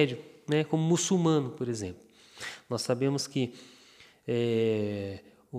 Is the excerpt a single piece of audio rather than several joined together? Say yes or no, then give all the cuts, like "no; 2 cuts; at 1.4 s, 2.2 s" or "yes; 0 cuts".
yes; 0 cuts